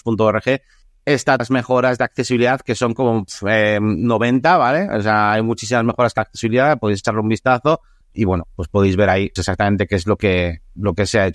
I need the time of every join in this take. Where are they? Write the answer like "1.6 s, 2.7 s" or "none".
1.4 s, 6.2 s, 8.1 s, 9.4 s